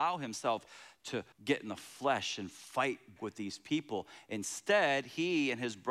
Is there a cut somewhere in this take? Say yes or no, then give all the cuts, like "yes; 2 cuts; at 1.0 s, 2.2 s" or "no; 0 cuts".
yes; 2 cuts; at 1.3 s, 3.2 s